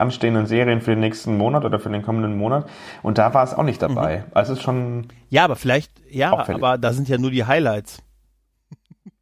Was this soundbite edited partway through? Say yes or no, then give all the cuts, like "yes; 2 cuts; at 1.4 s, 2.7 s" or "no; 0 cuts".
no; 0 cuts